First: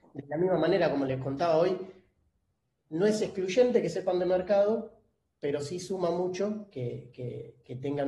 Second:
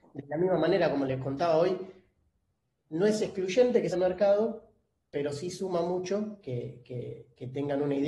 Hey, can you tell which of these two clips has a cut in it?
second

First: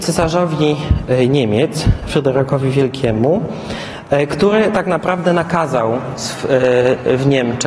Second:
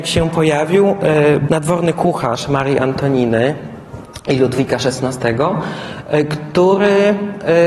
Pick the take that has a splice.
second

